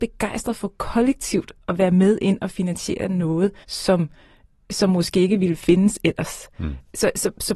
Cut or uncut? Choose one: cut